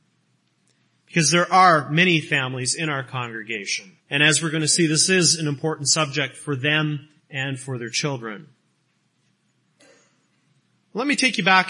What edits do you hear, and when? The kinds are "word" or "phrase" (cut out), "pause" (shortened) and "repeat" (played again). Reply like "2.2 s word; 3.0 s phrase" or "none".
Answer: 4.0 s pause; 7.2 s pause